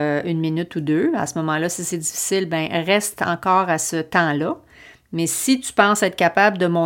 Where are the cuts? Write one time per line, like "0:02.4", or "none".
none